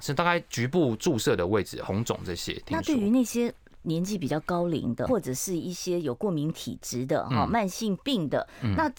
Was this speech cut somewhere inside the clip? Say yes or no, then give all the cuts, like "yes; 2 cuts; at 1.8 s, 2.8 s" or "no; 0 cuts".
yes; 1 cut; at 5.1 s